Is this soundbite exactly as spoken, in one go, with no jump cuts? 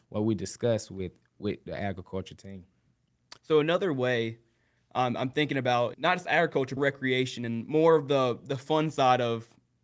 no; 3 cuts; at 3.4 s, 5.9 s, 6.8 s

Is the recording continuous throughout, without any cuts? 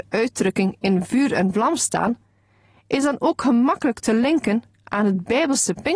yes; 0 cuts

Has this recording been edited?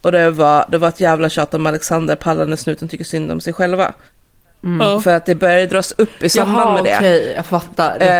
no; 0 cuts

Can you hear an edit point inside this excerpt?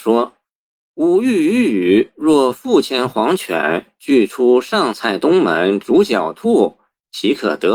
no; 0 cuts

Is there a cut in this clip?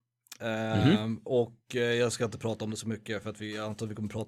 no; 0 cuts

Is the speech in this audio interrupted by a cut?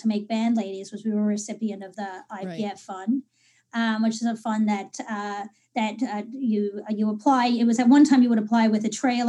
no; 0 cuts

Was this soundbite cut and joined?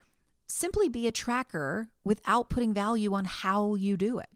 no; 0 cuts

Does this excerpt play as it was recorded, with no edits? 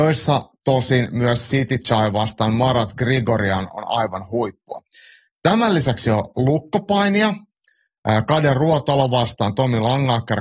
yes; 0 cuts

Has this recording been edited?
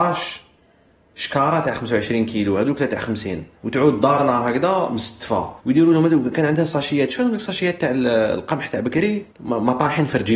yes; 3 cuts; at 3.5 s, 5.6 s, 9.3 s

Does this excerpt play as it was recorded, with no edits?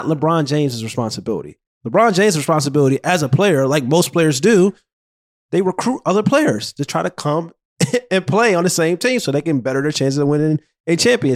yes; 0 cuts

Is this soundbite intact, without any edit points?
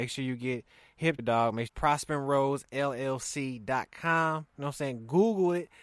no; 2 cuts; at 1.2 s, 1.7 s

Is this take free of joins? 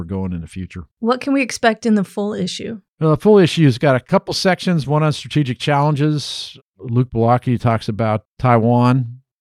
no; 2 cuts; at 0.9 s, 2.9 s

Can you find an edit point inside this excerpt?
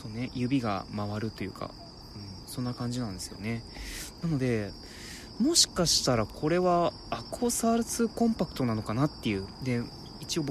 no; 0 cuts

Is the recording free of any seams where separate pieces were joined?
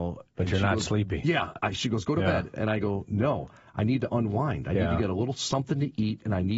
yes; 0 cuts

